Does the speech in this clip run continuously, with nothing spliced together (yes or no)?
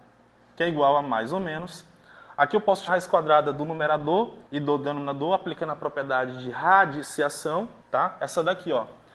no